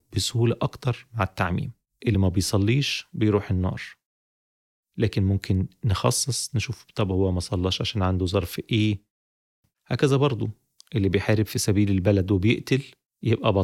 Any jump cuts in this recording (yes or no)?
no